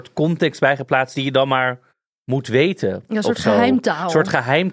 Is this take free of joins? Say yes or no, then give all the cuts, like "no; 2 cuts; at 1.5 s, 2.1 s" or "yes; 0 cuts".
no; 1 cut; at 1.9 s